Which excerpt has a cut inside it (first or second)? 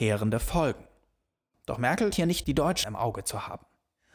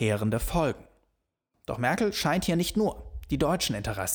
first